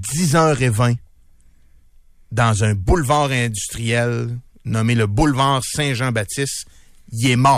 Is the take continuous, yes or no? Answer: yes